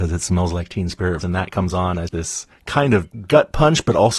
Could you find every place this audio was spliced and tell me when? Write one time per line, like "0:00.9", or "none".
0:01.2
0:02.1